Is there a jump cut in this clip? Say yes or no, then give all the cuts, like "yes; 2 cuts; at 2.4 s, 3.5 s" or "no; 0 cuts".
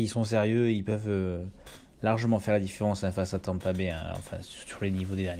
no; 0 cuts